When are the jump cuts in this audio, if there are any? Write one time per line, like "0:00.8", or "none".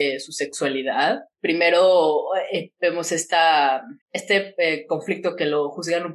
0:01.3
0:04.0